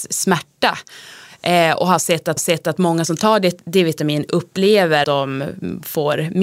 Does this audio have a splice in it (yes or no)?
yes